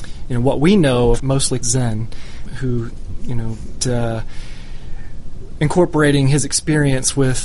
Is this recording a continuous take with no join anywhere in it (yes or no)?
no